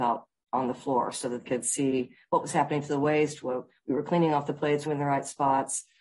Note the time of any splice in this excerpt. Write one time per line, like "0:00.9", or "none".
0:01.4
0:04.9